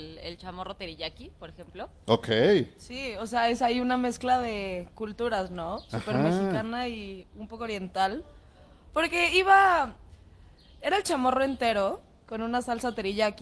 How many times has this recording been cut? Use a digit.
0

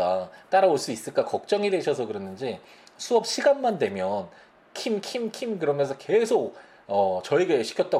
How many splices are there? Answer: 0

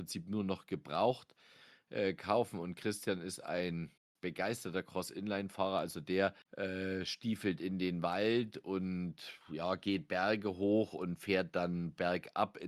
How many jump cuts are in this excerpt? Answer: 3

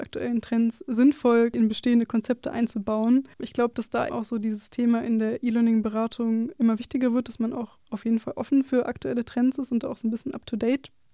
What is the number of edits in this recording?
2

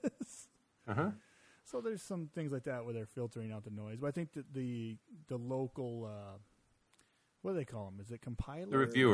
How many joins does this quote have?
0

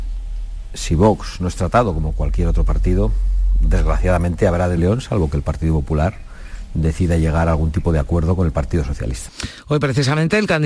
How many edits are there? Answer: 1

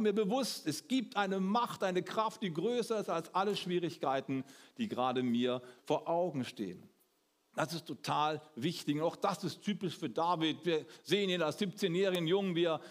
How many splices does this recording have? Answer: 1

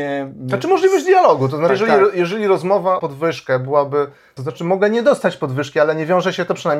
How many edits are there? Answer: 3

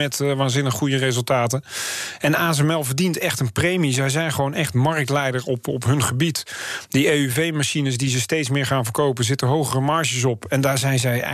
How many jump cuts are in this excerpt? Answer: 0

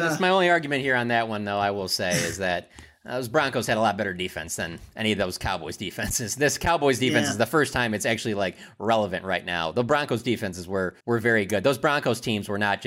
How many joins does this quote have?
1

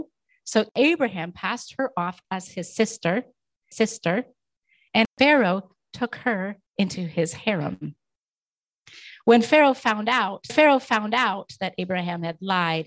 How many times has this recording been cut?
3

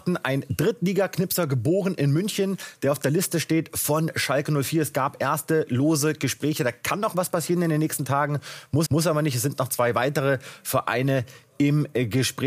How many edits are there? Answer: 1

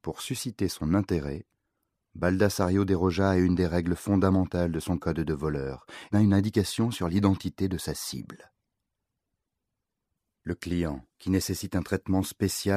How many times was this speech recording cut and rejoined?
2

